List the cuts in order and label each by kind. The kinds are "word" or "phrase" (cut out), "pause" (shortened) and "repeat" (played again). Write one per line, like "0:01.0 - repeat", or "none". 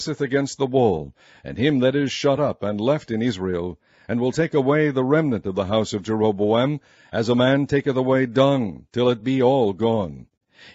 none